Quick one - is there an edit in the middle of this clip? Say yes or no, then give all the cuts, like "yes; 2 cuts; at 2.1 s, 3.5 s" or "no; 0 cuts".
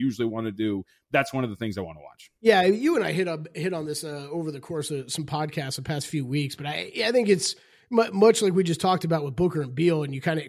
no; 0 cuts